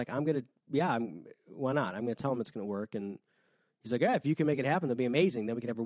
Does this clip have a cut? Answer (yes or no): no